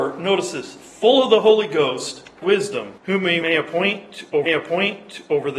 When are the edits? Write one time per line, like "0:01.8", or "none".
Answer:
0:02.4
0:03.0
0:03.4
0:04.5